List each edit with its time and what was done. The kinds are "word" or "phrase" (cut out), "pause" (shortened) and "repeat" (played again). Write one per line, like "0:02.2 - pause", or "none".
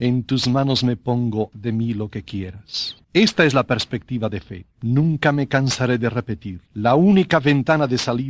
0:01.5 - word
0:06.7 - pause